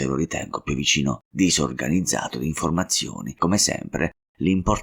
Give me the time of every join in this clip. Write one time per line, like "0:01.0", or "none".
0:01.3
0:03.4

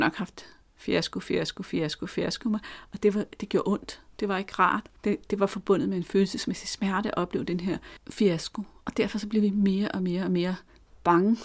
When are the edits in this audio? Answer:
0:05.0

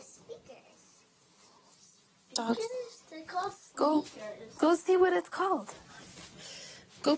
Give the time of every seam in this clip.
0:03.7

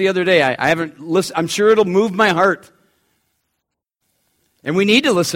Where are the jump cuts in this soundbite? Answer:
none

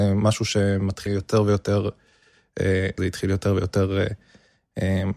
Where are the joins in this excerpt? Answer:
0:01.1
0:03.0

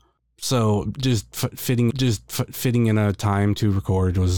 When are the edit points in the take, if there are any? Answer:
0:01.9

